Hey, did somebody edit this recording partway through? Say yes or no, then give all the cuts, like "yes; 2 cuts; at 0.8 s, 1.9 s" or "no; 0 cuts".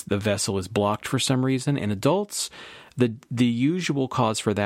no; 0 cuts